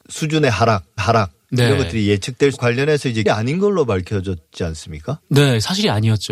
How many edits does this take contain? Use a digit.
3